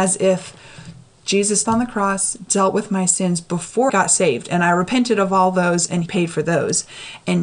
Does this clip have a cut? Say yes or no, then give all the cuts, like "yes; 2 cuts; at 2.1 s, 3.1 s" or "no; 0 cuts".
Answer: yes; 3 cuts; at 1.7 s, 3.9 s, 6.1 s